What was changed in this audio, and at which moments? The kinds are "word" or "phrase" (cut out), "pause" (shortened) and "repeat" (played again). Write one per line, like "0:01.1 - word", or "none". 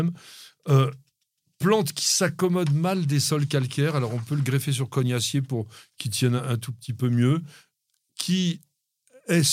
none